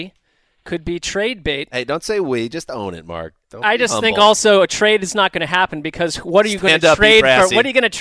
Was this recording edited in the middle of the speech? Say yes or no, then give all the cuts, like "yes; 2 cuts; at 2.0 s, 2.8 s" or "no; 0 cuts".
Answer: no; 0 cuts